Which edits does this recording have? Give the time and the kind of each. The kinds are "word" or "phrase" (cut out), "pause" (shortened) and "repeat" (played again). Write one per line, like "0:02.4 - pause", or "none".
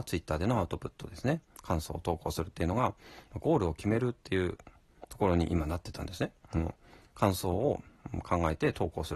none